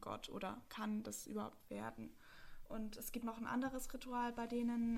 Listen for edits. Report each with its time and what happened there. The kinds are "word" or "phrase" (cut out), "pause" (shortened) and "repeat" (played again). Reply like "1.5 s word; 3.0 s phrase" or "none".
3.2 s word